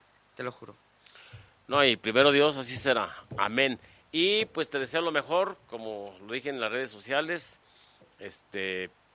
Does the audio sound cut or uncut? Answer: uncut